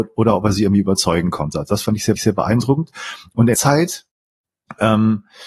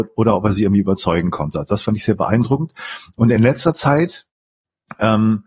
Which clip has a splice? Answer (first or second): first